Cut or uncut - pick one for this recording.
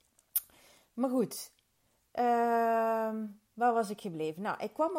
uncut